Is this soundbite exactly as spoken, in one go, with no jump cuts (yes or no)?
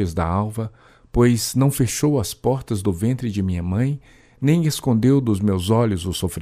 yes